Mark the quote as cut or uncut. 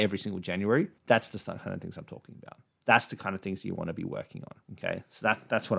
cut